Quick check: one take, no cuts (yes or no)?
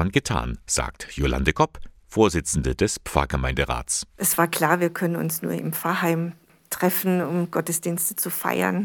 yes